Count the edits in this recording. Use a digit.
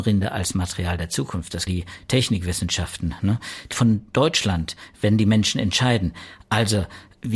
2